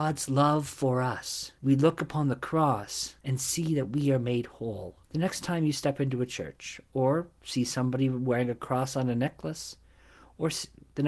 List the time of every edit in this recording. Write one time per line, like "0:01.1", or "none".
0:01.6
0:03.2
0:05.0